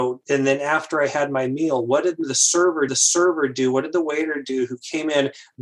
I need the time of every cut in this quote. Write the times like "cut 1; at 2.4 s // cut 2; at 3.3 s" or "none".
cut 1; at 2.9 s